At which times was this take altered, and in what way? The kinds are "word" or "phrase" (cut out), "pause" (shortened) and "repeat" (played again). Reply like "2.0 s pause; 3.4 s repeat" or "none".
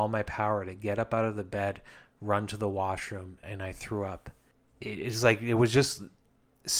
3.4 s word; 4.5 s pause